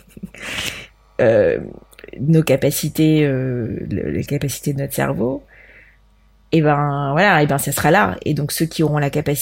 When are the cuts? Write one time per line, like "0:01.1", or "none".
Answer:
none

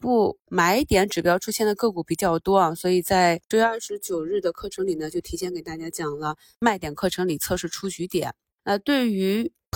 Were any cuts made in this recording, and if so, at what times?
none

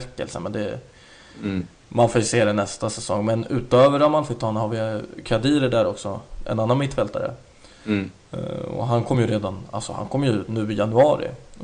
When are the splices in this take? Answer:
none

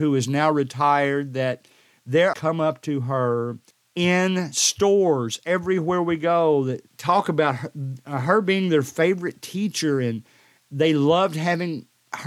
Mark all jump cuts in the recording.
0:02.3
0:03.7
0:06.9

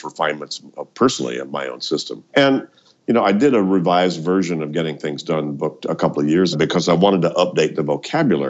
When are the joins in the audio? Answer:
0:02.3
0:06.5

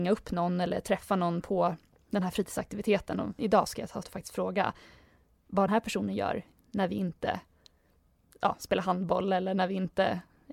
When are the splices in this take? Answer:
0:03.4
0:04.0
0:05.7

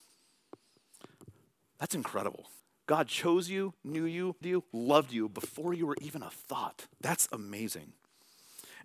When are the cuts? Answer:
0:02.6
0:04.4
0:06.9

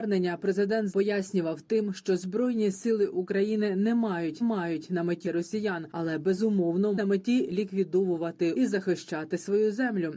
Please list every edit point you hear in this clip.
0:00.9
0:04.4
0:05.2
0:07.0
0:08.5

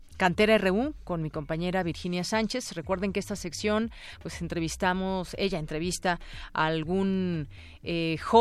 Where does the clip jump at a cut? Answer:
none

